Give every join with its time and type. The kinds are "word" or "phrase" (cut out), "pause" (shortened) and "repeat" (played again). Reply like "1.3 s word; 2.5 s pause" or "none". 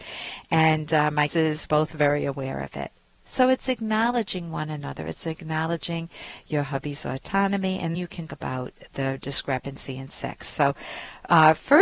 1.3 s word; 1.7 s word; 7.9 s word; 8.3 s word; 8.9 s word